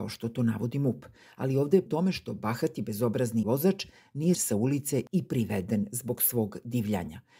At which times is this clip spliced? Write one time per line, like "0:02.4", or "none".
0:01.9
0:03.4
0:04.3